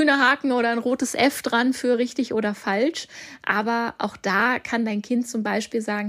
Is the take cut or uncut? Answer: uncut